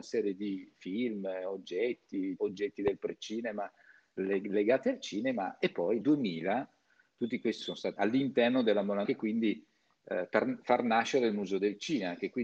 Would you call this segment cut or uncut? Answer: cut